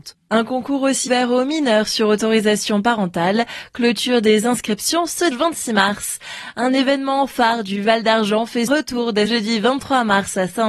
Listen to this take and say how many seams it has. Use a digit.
4